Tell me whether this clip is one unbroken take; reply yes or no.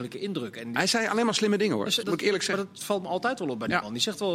no